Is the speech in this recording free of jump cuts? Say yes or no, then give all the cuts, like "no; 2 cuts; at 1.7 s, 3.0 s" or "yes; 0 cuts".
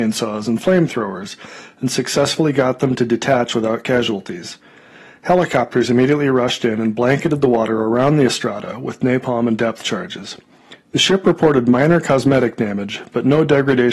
yes; 0 cuts